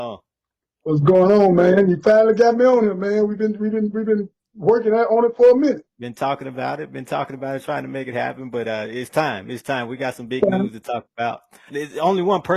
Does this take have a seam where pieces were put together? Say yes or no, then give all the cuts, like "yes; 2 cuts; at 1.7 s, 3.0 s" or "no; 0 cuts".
yes; 1 cut; at 5.9 s